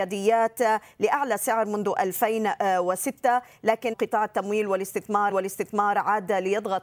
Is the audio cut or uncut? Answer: cut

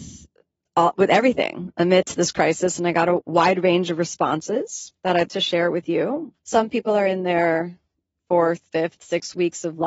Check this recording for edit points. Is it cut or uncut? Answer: cut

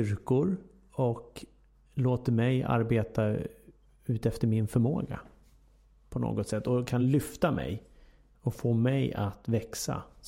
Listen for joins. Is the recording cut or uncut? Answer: uncut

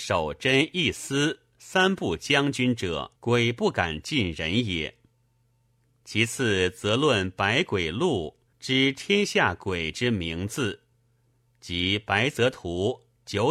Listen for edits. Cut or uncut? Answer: cut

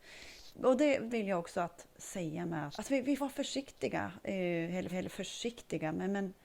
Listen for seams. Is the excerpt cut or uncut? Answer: cut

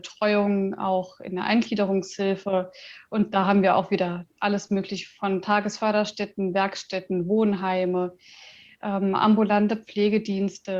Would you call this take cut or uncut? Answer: uncut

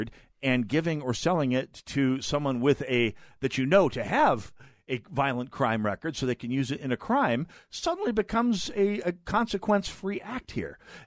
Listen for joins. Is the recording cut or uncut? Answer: uncut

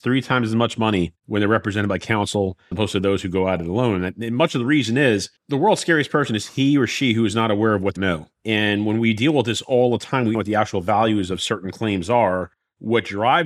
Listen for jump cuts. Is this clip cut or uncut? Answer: cut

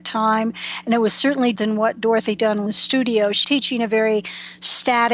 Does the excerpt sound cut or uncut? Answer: cut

